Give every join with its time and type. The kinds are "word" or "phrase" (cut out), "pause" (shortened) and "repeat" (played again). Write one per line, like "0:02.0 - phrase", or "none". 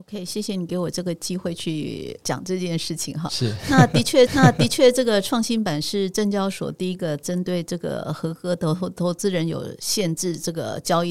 0:04.3 - repeat